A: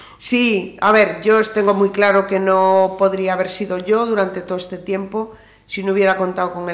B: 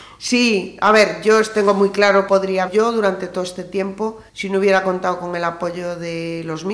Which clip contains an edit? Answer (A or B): B